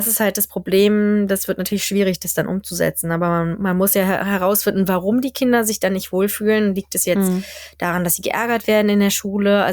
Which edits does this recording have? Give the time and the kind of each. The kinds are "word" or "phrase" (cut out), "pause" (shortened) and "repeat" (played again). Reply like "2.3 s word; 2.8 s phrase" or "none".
none